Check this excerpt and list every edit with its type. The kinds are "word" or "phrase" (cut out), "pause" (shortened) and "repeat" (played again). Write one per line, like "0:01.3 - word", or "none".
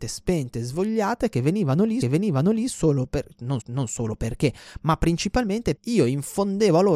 0:02.0 - repeat
0:03.6 - repeat
0:05.8 - word